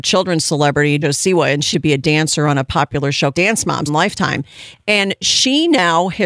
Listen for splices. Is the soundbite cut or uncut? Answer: cut